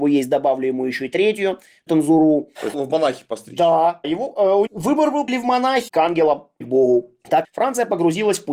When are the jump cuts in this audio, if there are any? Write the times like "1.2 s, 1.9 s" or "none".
1.9 s, 2.7 s, 4.0 s, 4.7 s, 5.3 s, 5.9 s, 6.6 s, 7.4 s

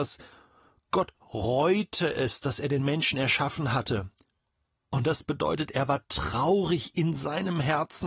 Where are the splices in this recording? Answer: none

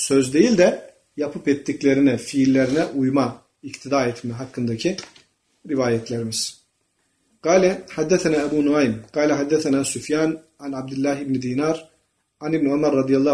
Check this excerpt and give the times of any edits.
none

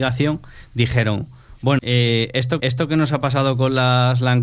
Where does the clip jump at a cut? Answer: 1.8 s, 2.6 s

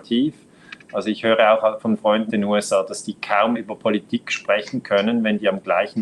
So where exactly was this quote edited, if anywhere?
2.3 s, 3.5 s

